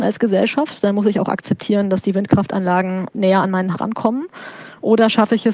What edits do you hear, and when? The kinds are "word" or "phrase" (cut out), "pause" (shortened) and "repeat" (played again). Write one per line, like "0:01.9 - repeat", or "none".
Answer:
0:03.7 - word